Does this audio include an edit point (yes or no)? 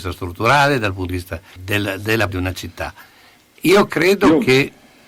yes